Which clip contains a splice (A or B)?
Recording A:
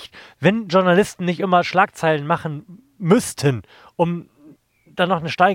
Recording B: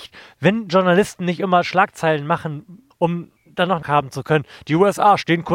B